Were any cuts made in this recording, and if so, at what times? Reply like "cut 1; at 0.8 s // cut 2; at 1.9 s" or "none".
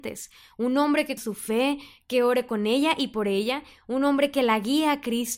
cut 1; at 1.2 s